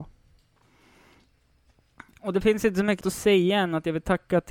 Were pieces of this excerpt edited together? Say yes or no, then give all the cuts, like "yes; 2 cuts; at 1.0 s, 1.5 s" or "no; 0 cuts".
yes; 1 cut; at 3.0 s